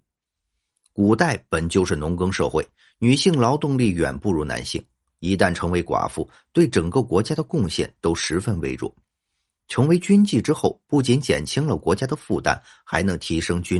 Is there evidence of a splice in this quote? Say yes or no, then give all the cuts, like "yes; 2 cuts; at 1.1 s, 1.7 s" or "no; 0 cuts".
no; 0 cuts